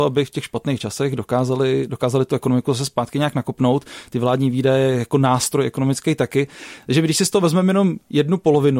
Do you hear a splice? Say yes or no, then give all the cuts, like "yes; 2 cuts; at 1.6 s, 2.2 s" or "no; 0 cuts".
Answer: no; 0 cuts